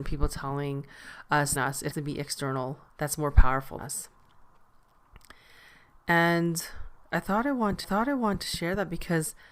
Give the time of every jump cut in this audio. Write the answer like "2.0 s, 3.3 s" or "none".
1.6 s, 1.9 s, 2.9 s, 3.8 s, 7.0 s, 7.8 s